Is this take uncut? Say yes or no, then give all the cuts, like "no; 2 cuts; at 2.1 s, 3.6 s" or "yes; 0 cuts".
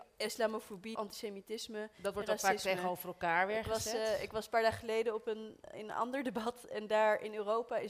no; 2 cuts; at 0.9 s, 5.7 s